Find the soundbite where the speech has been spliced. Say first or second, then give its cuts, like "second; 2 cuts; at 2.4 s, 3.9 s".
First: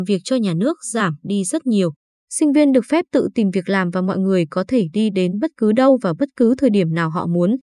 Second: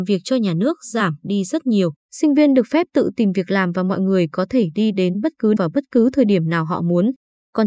second; 2 cuts; at 2.0 s, 5.6 s